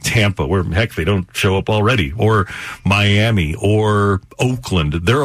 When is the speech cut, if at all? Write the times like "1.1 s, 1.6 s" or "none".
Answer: none